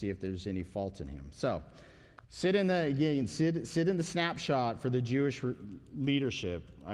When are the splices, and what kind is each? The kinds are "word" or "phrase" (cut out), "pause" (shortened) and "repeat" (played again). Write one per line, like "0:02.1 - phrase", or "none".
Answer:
0:02.2 - pause